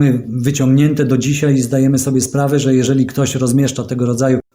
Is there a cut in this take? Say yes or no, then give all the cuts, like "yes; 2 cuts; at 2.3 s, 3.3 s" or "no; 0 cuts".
no; 0 cuts